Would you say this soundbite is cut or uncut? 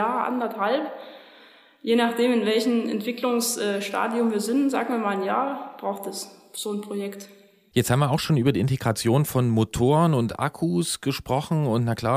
uncut